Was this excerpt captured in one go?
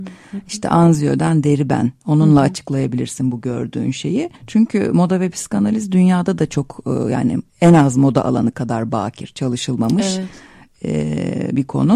no; 2 cuts; at 4.4 s, 7.5 s

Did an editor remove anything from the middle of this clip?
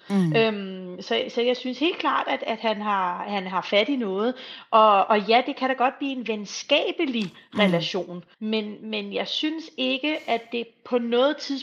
yes; 1 cut; at 8.3 s

